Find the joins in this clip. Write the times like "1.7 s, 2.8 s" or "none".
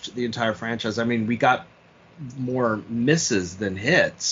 none